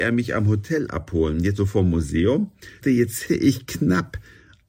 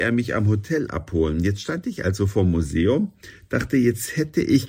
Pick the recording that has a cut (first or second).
first